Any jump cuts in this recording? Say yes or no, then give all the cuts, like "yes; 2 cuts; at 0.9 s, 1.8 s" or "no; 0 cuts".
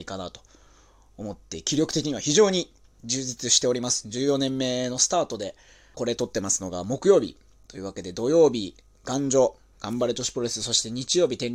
yes; 1 cut; at 5.9 s